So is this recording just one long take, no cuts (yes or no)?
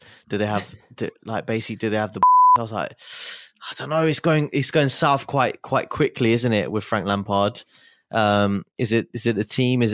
yes